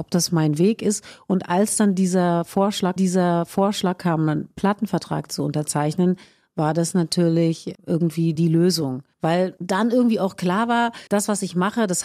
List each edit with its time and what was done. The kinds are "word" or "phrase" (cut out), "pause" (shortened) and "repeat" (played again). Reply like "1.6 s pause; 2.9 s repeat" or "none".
3.0 s repeat; 8.4 s word; 9.1 s pause; 11.1 s pause